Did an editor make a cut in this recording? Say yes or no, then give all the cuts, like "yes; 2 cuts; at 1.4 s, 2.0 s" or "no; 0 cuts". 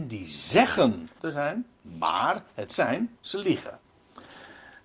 yes; 2 cuts; at 1.2 s, 2.7 s